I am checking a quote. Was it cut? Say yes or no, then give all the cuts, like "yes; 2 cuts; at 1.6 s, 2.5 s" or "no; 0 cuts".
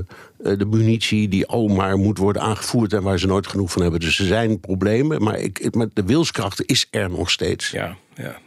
no; 0 cuts